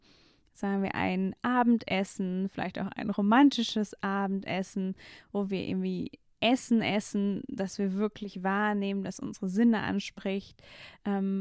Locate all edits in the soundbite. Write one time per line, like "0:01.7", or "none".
none